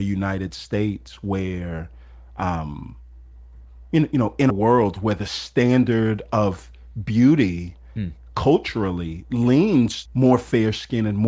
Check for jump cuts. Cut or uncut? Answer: cut